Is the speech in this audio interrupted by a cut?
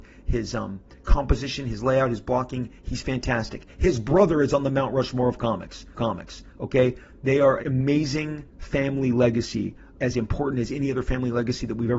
yes; 4 cuts; at 6.0 s, 7.6 s, 8.5 s, 9.9 s

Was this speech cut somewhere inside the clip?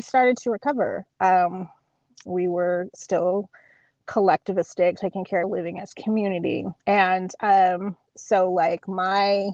yes; 3 cuts; at 5.0 s, 5.4 s, 6.8 s

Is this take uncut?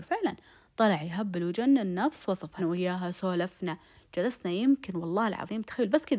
no; 1 cut; at 2.6 s

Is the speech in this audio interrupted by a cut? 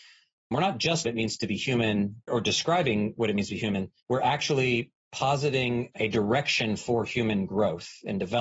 yes; 4 cuts; at 1.0 s, 2.3 s, 4.0 s, 5.9 s

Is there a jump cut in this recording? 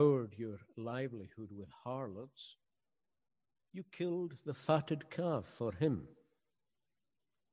no; 0 cuts

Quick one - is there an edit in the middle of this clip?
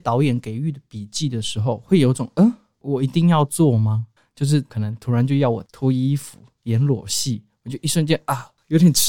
yes; 1 cut; at 4.2 s

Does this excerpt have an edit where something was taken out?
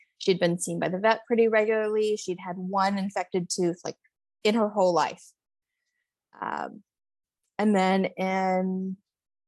no; 0 cuts

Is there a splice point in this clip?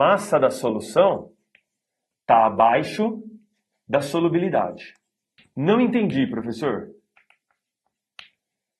no; 0 cuts

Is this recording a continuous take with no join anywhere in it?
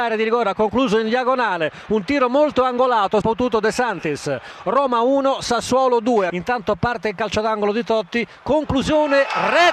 no; 1 cut; at 3.2 s

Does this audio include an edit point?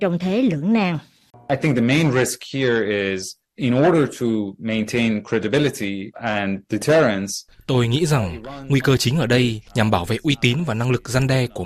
yes; 3 cuts; at 3.5 s, 6.1 s, 9.7 s

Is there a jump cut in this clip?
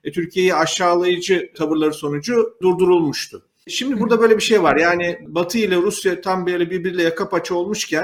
no; 0 cuts

